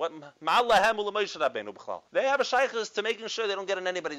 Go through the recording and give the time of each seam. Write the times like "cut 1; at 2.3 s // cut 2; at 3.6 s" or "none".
cut 1; at 2.1 s

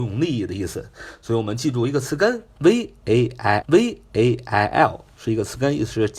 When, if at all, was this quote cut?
cut 1; at 3.6 s

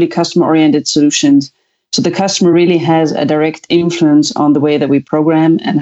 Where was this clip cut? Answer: none

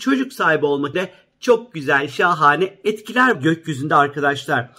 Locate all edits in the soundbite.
cut 1; at 0.9 s // cut 2; at 3.3 s

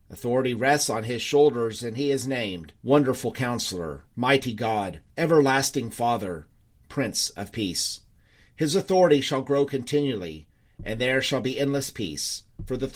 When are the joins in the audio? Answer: cut 1; at 2.8 s // cut 2; at 4.1 s // cut 3; at 5.1 s

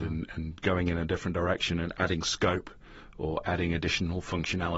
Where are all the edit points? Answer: none

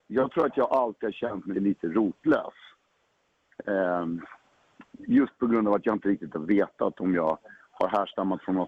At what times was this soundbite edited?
cut 1; at 1.5 s

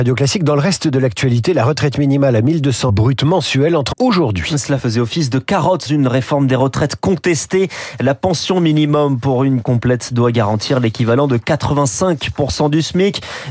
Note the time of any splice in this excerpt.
cut 1; at 2.9 s // cut 2; at 3.9 s // cut 3; at 4.8 s // cut 4; at 5.9 s // cut 5; at 9.6 s

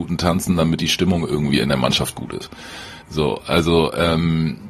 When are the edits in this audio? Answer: cut 1; at 3.0 s

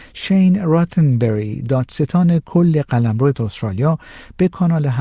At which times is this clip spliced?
cut 1; at 3.3 s

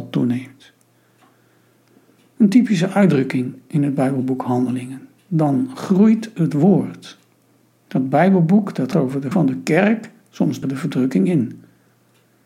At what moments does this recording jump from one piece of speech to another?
cut 1; at 8.9 s // cut 2; at 9.3 s // cut 3; at 10.6 s

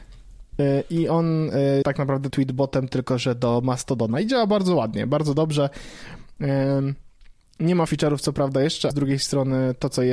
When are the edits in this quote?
cut 1; at 1.8 s // cut 2; at 2.3 s // cut 3; at 7.9 s // cut 4; at 8.9 s

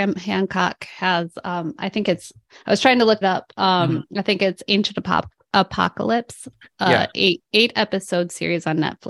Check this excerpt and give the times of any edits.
cut 1; at 3.2 s

